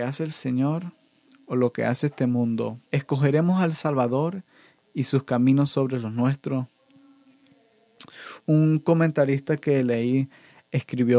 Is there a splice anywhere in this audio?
yes; 1 cut; at 2.9 s

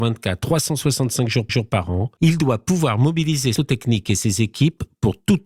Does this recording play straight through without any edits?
no; 2 cuts; at 1.5 s, 3.6 s

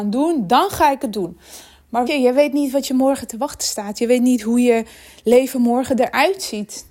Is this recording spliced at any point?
yes; 1 cut; at 2.1 s

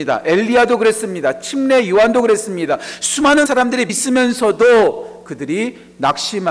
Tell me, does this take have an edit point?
yes; 2 cuts; at 3.5 s, 3.9 s

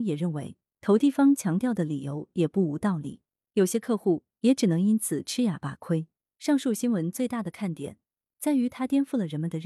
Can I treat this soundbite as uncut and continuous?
yes; 0 cuts

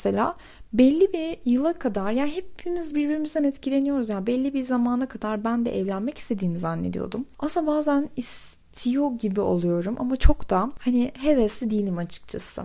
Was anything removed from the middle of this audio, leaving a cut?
no; 0 cuts

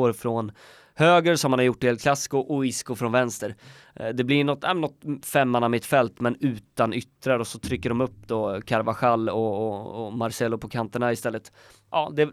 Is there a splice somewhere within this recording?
no; 0 cuts

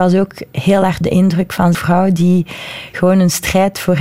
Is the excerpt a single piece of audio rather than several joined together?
no; 2 cuts; at 1.0 s, 1.7 s

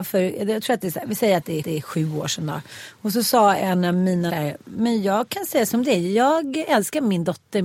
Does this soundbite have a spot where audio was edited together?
yes; 2 cuts; at 1.6 s, 4.3 s

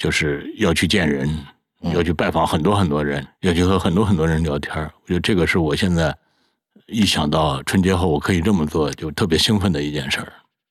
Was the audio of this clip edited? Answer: yes; 1 cut; at 3.2 s

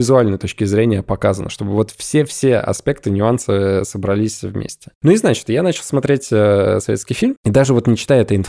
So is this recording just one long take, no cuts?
yes; 0 cuts

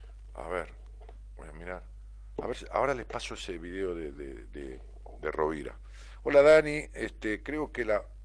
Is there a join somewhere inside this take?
no; 0 cuts

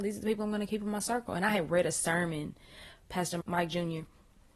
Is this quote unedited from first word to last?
no; 1 cut; at 3.4 s

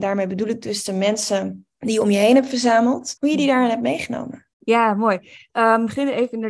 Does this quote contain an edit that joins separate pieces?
yes; 3 cuts; at 1.7 s, 3.2 s, 4.5 s

